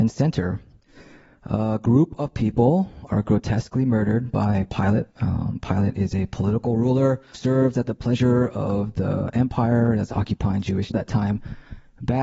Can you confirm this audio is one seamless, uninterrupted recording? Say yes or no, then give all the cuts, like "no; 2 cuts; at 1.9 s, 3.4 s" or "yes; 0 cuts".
no; 3 cuts; at 5.1 s, 7.3 s, 10.9 s